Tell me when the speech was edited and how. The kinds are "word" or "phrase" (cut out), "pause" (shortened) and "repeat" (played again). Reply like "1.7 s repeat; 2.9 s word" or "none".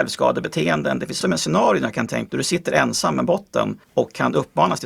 1.2 s word; 2.3 s word; 3.8 s pause